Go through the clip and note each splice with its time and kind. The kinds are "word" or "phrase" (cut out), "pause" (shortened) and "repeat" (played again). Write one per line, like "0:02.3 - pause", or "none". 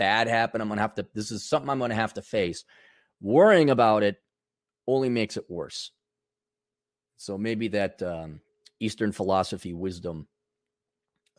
none